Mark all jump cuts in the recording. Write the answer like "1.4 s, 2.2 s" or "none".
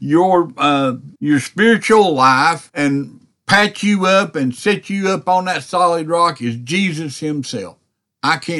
1.2 s, 2.7 s